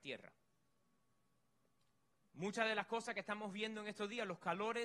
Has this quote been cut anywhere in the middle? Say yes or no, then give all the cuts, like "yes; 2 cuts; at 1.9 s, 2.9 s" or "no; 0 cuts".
no; 0 cuts